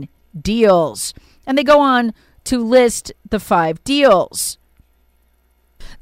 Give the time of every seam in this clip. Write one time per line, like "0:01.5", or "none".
none